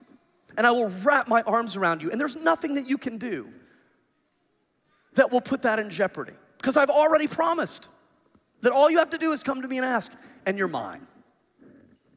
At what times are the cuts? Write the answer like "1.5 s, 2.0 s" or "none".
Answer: none